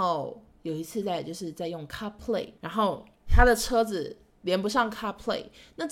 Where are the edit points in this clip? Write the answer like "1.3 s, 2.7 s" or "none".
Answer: 2.6 s, 3.1 s